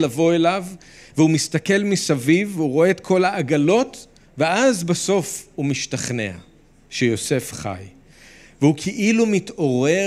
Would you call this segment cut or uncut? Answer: uncut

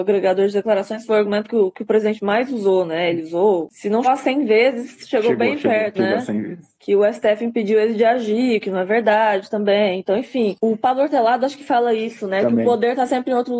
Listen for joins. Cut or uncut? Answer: cut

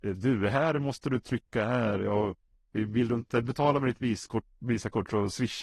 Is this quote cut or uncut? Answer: uncut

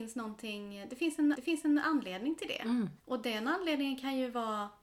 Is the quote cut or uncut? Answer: cut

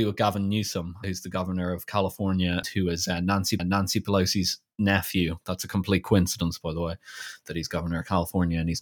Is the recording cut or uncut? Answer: cut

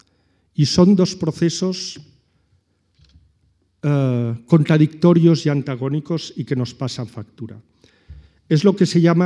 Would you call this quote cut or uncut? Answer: uncut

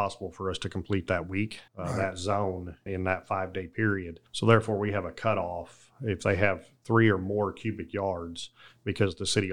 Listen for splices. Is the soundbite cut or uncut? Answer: cut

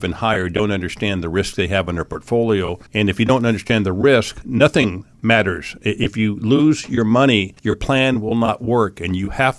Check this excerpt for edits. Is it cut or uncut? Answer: cut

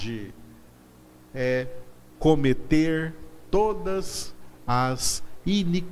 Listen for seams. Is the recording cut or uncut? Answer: uncut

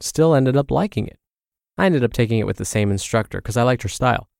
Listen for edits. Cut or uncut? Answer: uncut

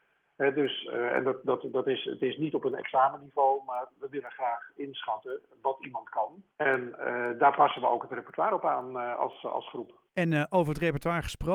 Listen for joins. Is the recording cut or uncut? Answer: cut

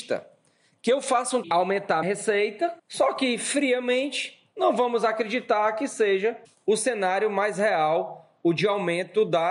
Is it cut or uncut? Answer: cut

